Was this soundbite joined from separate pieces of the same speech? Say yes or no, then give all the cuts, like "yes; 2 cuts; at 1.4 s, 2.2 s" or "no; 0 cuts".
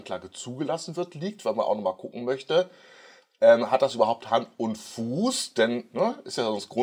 no; 0 cuts